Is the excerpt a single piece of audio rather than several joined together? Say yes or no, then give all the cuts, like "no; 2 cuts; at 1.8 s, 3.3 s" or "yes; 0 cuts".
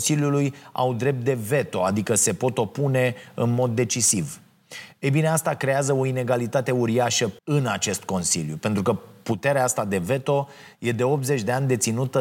no; 1 cut; at 7.4 s